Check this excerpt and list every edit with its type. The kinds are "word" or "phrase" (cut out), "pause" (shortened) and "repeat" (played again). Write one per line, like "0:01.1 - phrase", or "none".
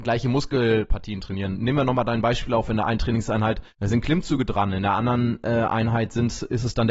0:03.7 - pause